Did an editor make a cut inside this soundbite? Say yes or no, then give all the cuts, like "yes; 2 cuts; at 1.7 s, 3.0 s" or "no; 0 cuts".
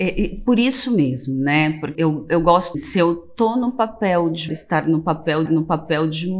yes; 4 cuts; at 1.9 s, 2.7 s, 4.5 s, 5.5 s